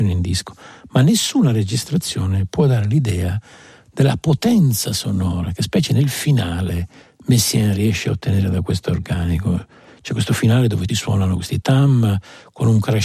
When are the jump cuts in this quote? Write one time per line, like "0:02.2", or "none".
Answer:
0:07.0
0:10.9
0:11.6